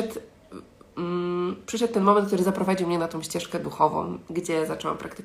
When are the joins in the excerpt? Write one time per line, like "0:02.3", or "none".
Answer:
none